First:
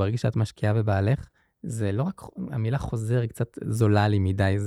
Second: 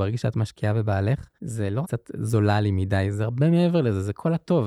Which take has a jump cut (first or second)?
second